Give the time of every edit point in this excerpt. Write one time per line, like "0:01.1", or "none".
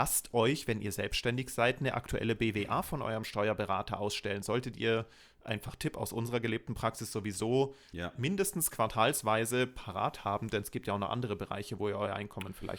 none